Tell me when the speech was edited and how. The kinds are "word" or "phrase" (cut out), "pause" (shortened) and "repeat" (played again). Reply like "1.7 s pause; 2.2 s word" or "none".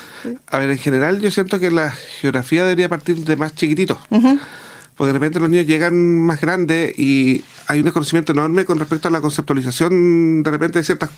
none